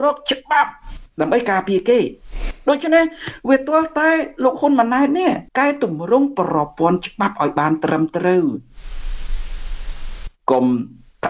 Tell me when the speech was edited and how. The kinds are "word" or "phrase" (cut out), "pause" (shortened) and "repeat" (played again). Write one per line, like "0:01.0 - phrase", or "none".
0:05.5 - pause